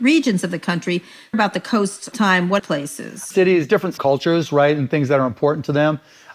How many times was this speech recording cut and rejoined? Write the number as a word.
five